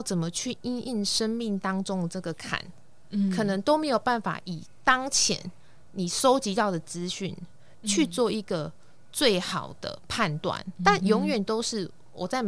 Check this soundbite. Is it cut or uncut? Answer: cut